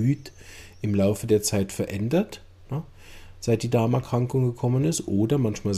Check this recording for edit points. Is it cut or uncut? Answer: uncut